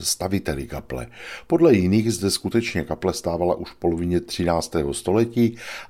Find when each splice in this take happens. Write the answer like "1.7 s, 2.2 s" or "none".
none